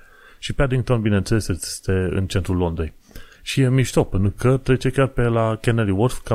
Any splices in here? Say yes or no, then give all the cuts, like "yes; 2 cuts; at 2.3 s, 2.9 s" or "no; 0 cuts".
yes; 1 cut; at 3.3 s